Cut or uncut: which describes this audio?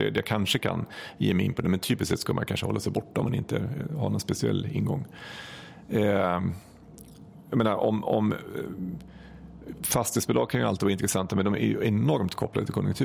uncut